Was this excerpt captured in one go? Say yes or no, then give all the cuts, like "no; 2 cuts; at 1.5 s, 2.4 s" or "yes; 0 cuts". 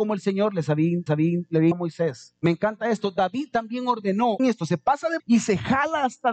no; 5 cuts; at 1.1 s, 1.7 s, 2.4 s, 4.4 s, 5.2 s